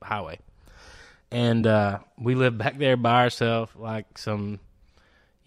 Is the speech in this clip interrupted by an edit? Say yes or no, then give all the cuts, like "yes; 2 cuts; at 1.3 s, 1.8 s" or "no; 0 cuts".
no; 0 cuts